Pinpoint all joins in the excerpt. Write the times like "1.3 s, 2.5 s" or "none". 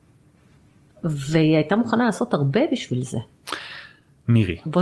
none